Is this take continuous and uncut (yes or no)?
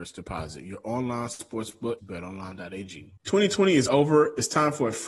no